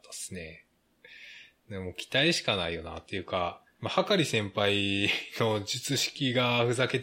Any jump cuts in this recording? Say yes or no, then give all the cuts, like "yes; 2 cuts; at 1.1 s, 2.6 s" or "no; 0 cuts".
no; 0 cuts